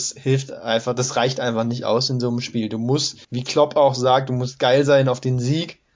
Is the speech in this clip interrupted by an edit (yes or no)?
yes